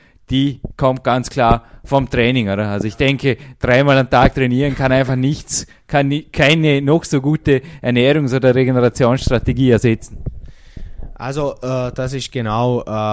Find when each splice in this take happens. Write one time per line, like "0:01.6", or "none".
none